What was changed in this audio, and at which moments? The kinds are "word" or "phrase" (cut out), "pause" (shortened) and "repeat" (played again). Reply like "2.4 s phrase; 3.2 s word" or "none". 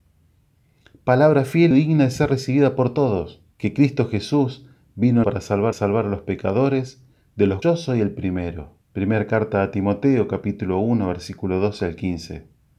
1.7 s word; 3.5 s pause; 5.2 s phrase; 5.7 s repeat; 7.6 s word; 8.8 s pause